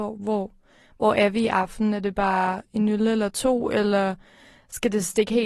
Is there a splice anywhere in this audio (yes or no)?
no